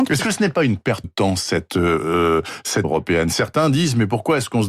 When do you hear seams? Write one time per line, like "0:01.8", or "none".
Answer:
0:01.0
0:02.8